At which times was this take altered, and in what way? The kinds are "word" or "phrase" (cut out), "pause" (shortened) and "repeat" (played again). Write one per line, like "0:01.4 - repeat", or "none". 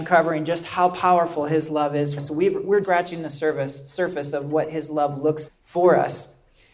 0:02.2 - word
0:02.8 - word
0:05.5 - word